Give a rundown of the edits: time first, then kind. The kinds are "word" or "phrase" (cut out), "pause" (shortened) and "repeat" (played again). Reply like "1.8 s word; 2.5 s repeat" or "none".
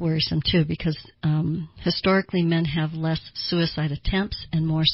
none

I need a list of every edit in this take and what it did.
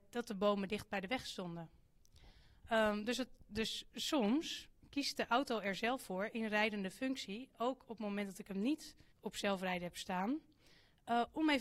9.1 s pause

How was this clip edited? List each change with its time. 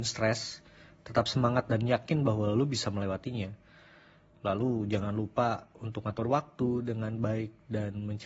none

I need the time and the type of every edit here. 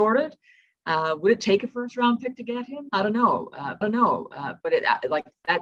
3.8 s repeat

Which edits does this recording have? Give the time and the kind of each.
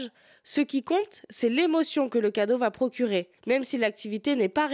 3.4 s pause

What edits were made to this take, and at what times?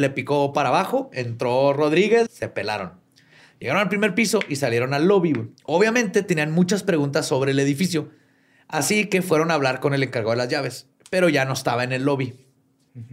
2.3 s word; 5.6 s pause

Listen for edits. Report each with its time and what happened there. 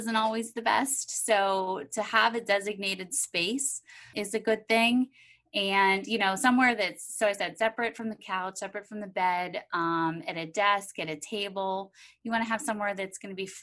4.1 s word

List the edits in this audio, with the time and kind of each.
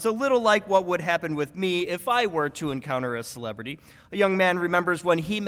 none

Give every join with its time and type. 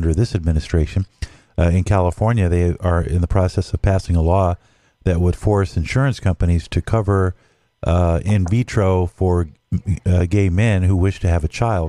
none

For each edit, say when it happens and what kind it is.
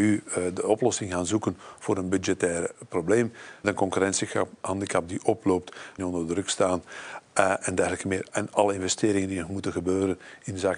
3.6 s word; 6.0 s phrase; 7.6 s word

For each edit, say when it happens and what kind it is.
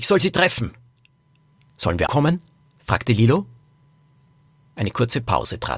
2.1 s word

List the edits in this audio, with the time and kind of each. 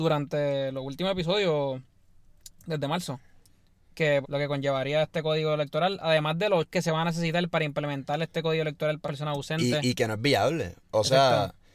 4.2 s word; 6.7 s word; 9.0 s word; 10.8 s pause

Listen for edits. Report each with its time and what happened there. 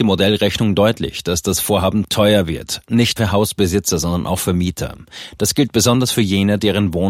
3.2 s word

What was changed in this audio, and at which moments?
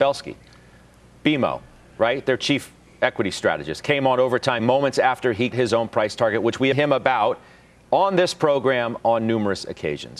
4.6 s word; 5.5 s word; 6.7 s phrase

